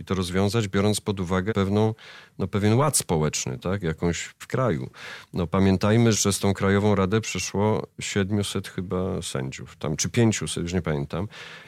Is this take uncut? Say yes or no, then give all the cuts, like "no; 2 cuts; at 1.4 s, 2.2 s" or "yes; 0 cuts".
no; 3 cuts; at 1.5 s, 4.4 s, 6.1 s